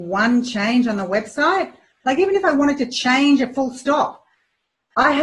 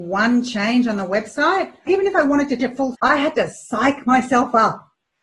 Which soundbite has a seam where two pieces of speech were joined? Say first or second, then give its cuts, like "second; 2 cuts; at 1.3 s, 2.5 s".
second; 3 cuts; at 1.9 s, 2.6 s, 2.9 s